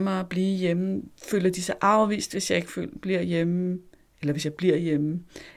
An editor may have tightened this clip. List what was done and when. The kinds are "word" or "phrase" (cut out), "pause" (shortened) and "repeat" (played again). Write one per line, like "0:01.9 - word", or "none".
none